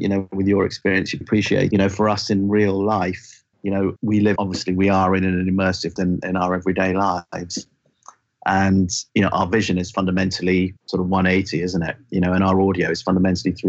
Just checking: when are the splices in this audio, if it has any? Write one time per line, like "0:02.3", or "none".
0:01.2
0:01.7
0:03.5
0:04.0
0:04.4
0:06.0
0:09.1
0:10.8